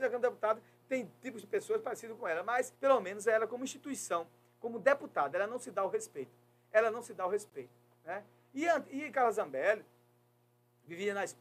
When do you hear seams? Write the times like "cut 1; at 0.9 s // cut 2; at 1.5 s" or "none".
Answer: cut 1; at 2.7 s